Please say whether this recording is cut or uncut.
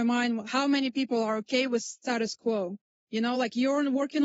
uncut